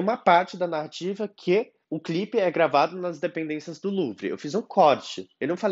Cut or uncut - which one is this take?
cut